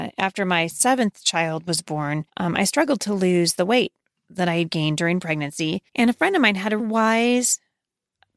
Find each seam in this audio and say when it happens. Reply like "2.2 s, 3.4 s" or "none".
2.3 s, 5.9 s, 6.8 s